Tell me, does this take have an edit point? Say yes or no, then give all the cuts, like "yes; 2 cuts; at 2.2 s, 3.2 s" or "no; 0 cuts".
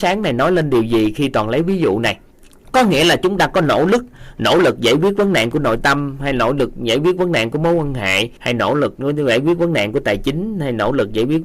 yes; 2 cuts; at 2.3 s, 8.4 s